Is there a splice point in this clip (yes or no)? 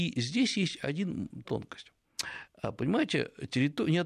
yes